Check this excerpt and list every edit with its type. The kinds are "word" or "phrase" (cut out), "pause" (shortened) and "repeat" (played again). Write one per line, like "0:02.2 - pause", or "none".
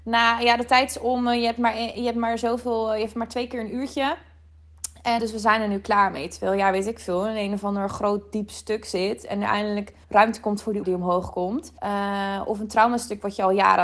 0:05.2 - word
0:10.0 - pause
0:10.8 - word
0:11.8 - pause